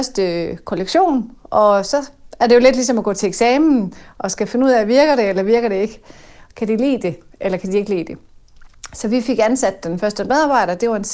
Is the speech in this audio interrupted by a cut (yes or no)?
no